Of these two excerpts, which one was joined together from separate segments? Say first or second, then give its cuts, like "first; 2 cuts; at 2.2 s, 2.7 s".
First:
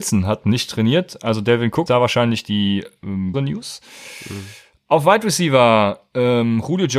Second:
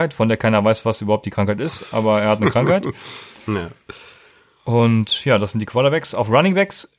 first; 2 cuts; at 1.9 s, 3.3 s